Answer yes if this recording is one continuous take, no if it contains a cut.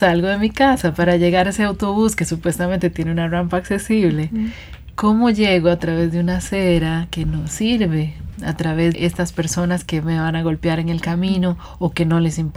no